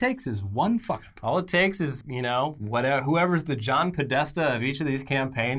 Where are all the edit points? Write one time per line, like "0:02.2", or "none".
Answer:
0:02.0